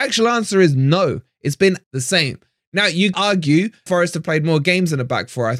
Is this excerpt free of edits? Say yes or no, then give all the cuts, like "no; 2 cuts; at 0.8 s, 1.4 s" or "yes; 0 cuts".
no; 3 cuts; at 1.8 s, 3.1 s, 3.9 s